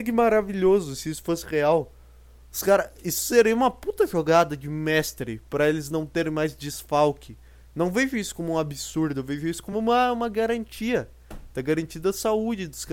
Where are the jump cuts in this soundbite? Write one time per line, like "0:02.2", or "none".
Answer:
none